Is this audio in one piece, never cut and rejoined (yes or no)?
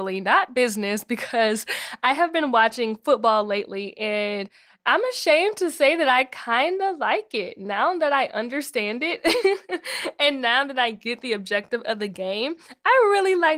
yes